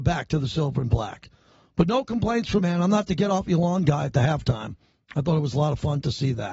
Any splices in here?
yes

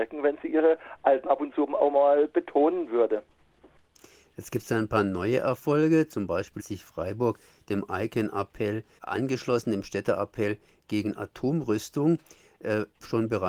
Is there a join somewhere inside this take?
yes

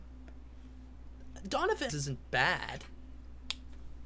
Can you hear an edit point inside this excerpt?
yes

